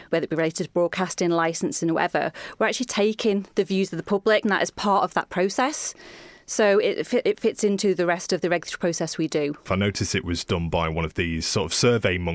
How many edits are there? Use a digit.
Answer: 1